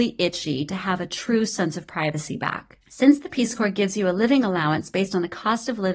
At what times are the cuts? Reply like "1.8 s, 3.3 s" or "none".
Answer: 2.8 s